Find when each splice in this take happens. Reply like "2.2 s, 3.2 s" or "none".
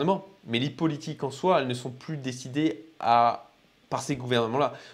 none